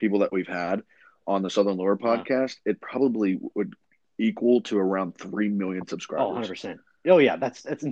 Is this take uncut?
yes; 0 cuts

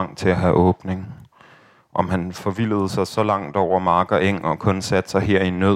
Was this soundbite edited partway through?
no; 0 cuts

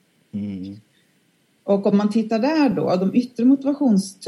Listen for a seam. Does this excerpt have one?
no; 0 cuts

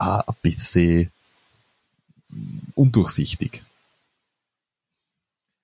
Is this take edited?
yes; 1 cut; at 2.7 s

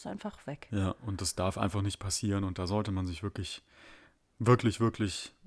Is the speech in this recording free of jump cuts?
yes; 0 cuts

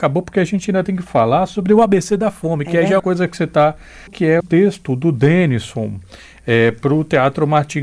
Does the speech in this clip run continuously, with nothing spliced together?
no; 3 cuts; at 3.0 s, 4.1 s, 4.4 s

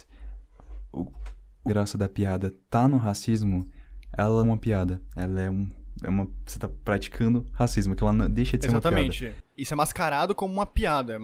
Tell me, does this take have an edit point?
yes; 3 cuts; at 1.7 s, 4.4 s, 9.5 s

